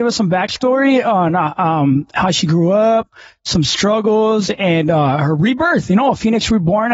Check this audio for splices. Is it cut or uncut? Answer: uncut